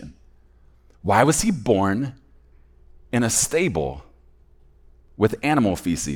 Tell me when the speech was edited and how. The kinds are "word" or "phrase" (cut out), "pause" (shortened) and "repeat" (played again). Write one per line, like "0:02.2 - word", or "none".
none